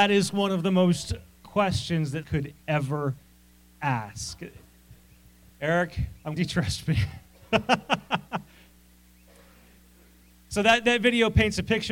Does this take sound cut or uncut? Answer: cut